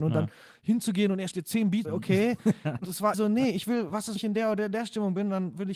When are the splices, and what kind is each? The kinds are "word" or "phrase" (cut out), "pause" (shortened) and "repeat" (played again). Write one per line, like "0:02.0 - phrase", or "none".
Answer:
0:01.3 - word
0:01.8 - word
0:02.8 - word
0:03.1 - word
0:04.2 - word